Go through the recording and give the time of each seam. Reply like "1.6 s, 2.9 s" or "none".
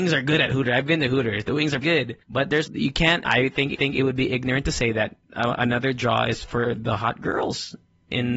1.8 s, 2.2 s, 2.7 s, 3.2 s, 3.7 s, 5.2 s